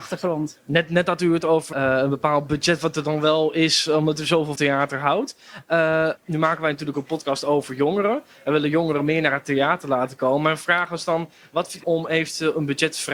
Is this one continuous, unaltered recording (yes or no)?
no